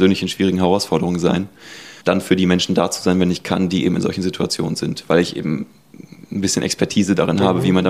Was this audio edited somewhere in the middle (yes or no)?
yes